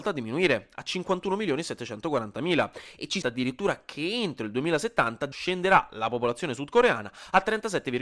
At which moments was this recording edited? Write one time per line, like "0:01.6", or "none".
0:03.2
0:05.3